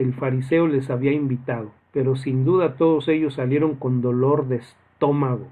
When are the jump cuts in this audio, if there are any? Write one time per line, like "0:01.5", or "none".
0:01.8